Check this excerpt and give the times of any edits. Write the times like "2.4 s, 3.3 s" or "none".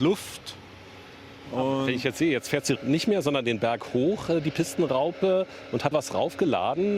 2.8 s, 5.9 s